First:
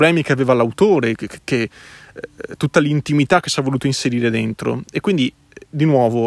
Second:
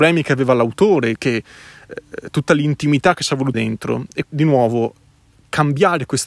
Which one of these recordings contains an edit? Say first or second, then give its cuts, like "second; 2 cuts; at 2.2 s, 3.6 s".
second; 3 cuts; at 1.2 s, 3.5 s, 4.2 s